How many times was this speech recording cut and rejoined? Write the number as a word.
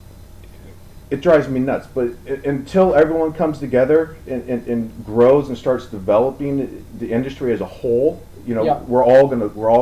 zero